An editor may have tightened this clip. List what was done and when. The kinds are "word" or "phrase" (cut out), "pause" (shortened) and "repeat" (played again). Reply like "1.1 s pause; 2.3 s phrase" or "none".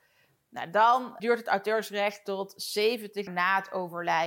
1.2 s word; 3.3 s word